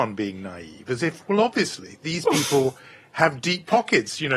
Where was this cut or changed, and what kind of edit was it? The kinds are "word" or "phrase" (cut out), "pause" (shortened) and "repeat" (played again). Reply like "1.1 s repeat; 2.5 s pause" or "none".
none